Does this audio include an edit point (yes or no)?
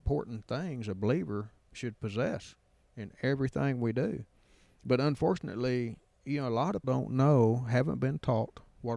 yes